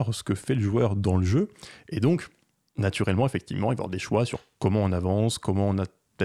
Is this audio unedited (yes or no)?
yes